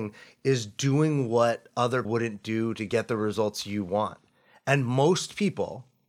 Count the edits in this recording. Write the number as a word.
one